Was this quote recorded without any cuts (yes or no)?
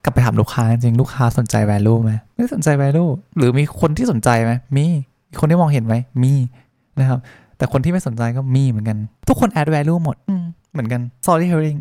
yes